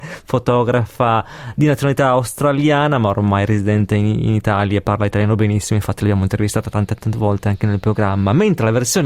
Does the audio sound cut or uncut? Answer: uncut